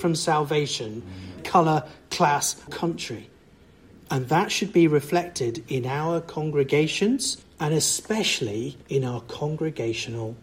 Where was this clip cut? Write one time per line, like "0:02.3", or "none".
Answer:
0:01.4
0:02.7
0:07.4
0:08.8

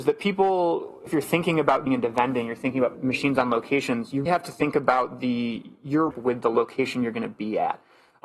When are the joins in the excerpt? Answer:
0:01.1
0:01.9
0:02.9
0:04.3
0:06.1

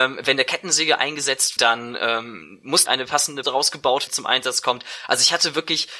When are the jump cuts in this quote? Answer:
0:01.6
0:02.9
0:03.4
0:04.1

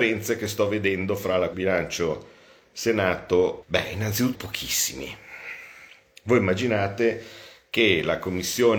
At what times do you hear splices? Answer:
0:01.5
0:03.6
0:04.3

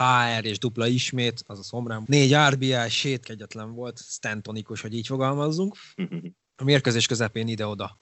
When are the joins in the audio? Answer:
0:02.1
0:03.2

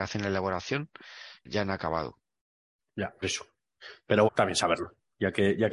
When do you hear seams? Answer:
0:01.5
0:03.2
0:04.3

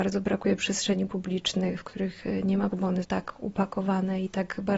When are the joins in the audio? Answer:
0:02.7
0:03.0

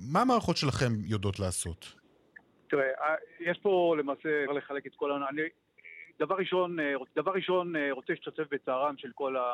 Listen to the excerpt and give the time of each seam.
0:04.5
0:07.1

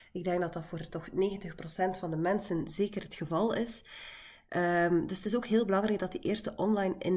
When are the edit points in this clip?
none

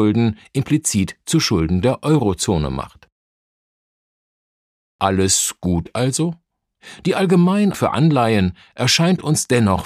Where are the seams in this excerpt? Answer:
0:07.7

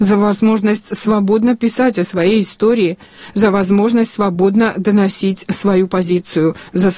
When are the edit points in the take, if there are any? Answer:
none

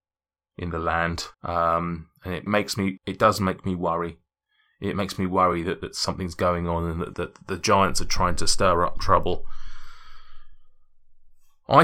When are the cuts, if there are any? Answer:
0:01.3
0:02.5
0:03.0
0:07.1

